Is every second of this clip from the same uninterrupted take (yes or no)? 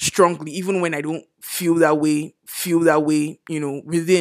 no